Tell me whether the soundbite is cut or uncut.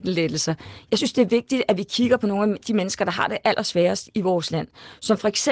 uncut